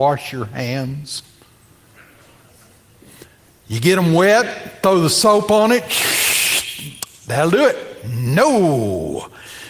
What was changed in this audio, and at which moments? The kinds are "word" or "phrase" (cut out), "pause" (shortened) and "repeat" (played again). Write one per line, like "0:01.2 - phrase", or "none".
none